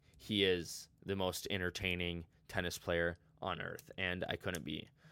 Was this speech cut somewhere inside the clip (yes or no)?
no